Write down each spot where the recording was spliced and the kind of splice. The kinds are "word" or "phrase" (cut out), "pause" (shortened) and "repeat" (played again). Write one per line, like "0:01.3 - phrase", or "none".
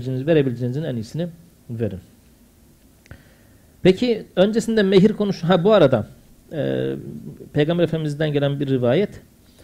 none